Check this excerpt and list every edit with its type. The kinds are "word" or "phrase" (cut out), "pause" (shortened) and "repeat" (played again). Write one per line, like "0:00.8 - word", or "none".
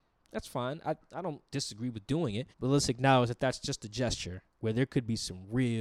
0:01.5 - pause
0:02.5 - pause
0:04.5 - pause